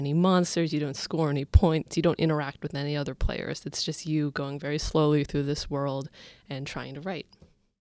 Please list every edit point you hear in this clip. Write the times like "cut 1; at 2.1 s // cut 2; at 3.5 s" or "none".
none